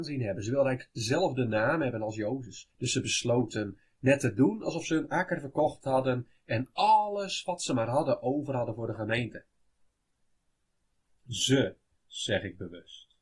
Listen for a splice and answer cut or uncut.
cut